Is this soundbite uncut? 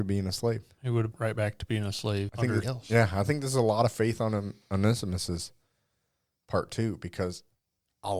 no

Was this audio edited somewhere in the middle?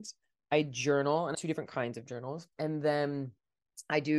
yes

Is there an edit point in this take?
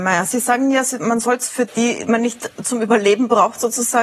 yes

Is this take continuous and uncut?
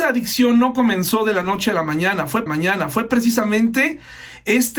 no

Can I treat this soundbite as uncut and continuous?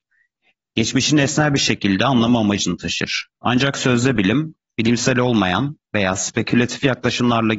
no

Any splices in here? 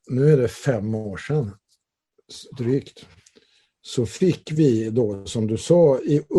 no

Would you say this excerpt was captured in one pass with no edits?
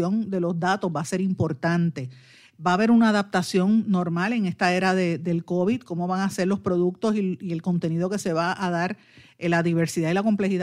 yes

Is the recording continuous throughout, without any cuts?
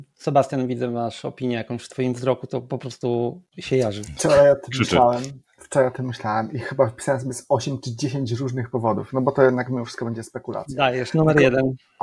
yes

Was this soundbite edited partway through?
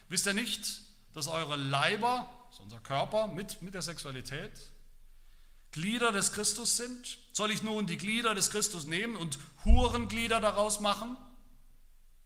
no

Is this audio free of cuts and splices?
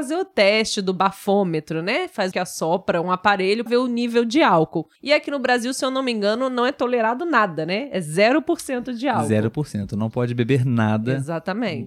no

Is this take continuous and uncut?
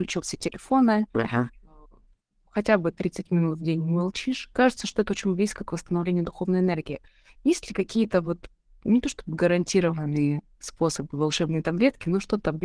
yes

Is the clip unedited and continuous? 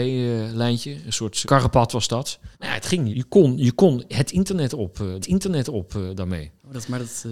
no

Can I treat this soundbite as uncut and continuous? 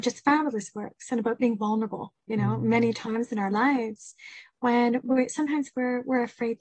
no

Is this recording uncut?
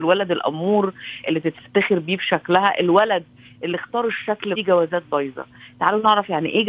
no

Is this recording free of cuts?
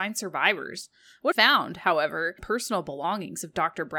no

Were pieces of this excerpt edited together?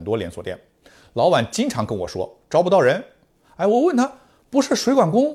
no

